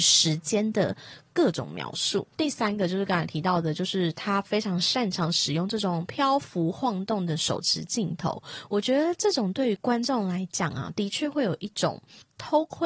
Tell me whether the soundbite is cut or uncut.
uncut